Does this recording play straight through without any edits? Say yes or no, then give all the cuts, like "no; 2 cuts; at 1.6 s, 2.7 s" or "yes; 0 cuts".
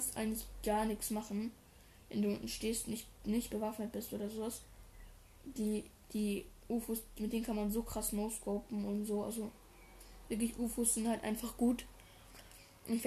yes; 0 cuts